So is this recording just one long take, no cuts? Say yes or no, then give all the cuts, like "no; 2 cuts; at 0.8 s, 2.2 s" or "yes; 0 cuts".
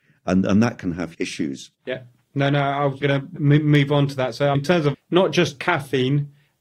no; 6 cuts; at 1.1 s, 1.7 s, 3.0 s, 3.4 s, 4.5 s, 4.9 s